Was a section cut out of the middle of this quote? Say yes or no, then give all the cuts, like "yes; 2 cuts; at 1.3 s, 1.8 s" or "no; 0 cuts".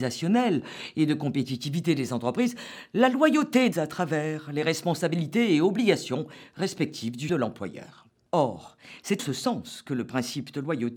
yes; 3 cuts; at 3.7 s, 7.3 s, 9.2 s